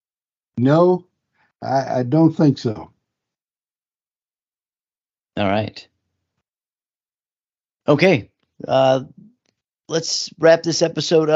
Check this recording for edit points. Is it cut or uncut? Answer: uncut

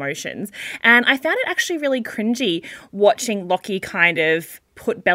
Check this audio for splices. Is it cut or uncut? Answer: uncut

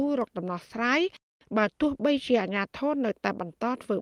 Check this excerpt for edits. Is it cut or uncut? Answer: uncut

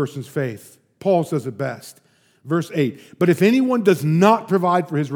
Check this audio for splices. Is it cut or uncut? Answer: uncut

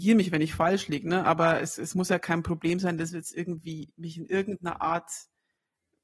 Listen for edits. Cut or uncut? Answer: uncut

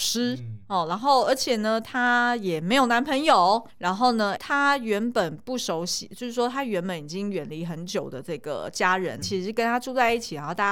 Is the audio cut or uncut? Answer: cut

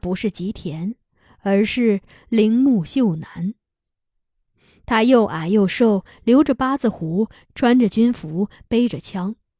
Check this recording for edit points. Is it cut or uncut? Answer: uncut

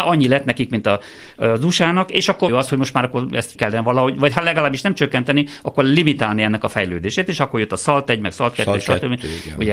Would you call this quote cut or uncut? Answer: cut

